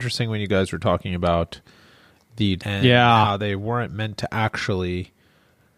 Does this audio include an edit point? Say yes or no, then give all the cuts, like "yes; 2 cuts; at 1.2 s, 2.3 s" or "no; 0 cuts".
yes; 1 cut; at 2.6 s